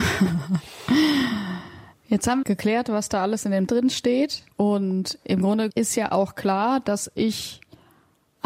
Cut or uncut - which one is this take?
cut